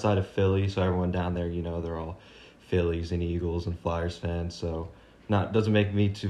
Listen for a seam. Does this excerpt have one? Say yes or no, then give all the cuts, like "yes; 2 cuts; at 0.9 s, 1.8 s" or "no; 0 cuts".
no; 0 cuts